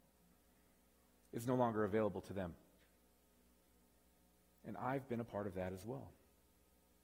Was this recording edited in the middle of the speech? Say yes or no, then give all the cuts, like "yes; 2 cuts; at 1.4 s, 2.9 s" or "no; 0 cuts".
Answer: no; 0 cuts